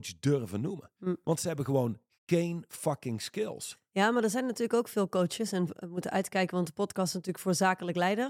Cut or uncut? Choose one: uncut